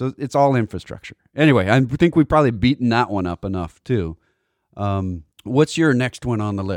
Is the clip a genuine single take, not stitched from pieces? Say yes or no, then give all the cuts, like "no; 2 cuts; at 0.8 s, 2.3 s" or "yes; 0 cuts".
no; 1 cut; at 5.3 s